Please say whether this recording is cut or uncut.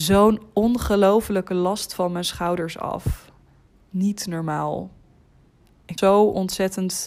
cut